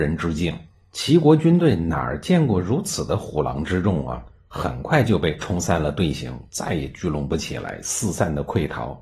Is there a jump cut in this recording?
no; 0 cuts

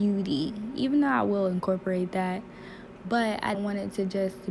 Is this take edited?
yes; 1 cut; at 3.5 s

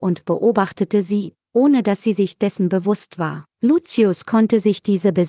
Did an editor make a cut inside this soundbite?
yes; 1 cut; at 3.5 s

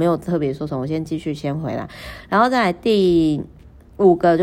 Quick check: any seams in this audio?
no; 0 cuts

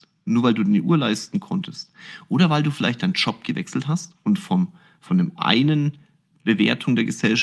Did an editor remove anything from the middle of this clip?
no; 0 cuts

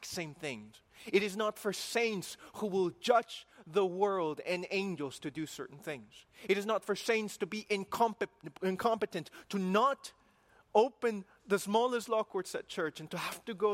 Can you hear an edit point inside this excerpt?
no; 0 cuts

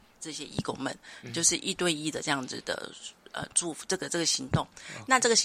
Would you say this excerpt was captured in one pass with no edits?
yes; 0 cuts

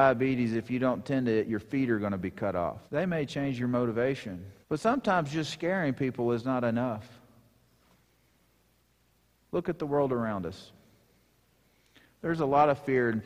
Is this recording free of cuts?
no; 2 cuts; at 2.9 s, 4.6 s

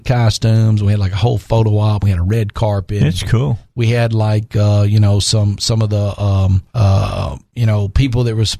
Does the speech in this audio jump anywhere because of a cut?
yes; 1 cut; at 6.7 s

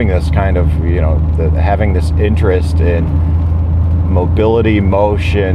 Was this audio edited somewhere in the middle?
no; 0 cuts

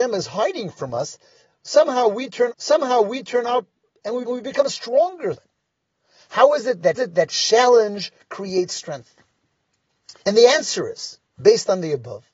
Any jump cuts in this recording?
yes; 6 cuts; at 2.5 s, 4.3 s, 5.4 s, 6.9 s, 10.2 s, 11.3 s

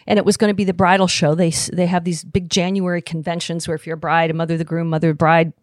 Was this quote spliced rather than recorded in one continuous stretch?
no; 0 cuts

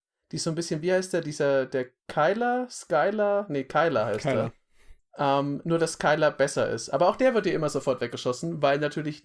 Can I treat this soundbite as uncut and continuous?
no; 2 cuts; at 2.0 s, 5.0 s

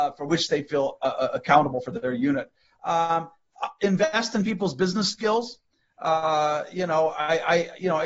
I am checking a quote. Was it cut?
no; 0 cuts

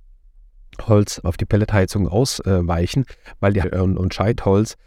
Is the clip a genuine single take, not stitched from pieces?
no; 2 cuts; at 1.2 s, 3.6 s

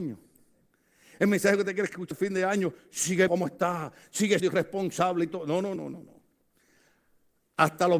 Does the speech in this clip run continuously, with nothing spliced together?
no; 4 cuts; at 2.1 s, 3.3 s, 4.4 s, 5.8 s

